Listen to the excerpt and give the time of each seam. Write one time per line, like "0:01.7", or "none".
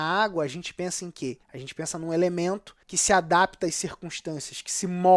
0:01.4
0:02.8

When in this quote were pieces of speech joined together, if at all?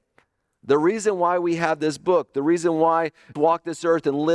0:03.4

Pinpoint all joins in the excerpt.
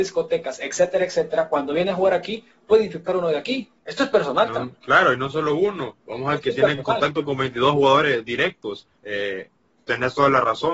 0:03.8
0:04.7
0:06.0
0:09.0

